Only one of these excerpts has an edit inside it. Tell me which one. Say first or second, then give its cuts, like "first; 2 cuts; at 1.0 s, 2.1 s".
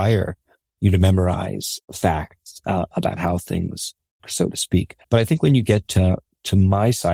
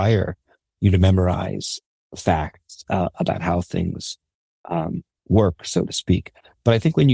first; 3 cuts; at 1.8 s, 4.2 s, 5.0 s